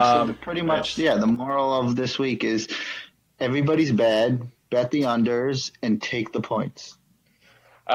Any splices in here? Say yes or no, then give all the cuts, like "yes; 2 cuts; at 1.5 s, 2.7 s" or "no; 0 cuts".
no; 0 cuts